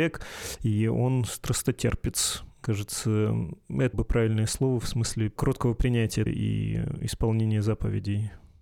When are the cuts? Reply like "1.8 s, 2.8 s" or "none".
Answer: 3.9 s, 6.3 s

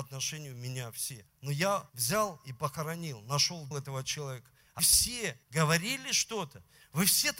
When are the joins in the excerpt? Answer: 1.3 s, 1.9 s, 3.7 s, 4.8 s, 5.4 s

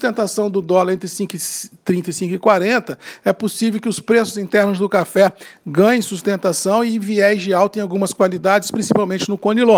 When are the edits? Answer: none

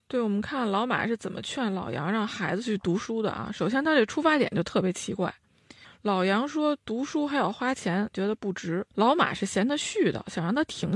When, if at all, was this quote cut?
8.9 s

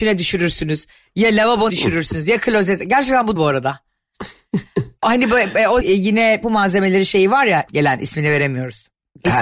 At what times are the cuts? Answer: 1.7 s, 3.4 s, 5.0 s, 5.8 s, 6.4 s, 7.7 s

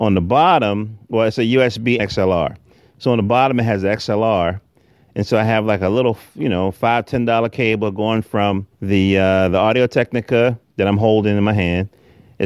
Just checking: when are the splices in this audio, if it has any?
2.0 s, 8.7 s, 10.6 s

